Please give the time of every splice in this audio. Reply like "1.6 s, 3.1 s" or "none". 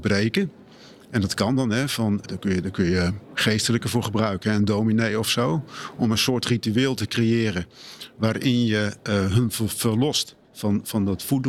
2.2 s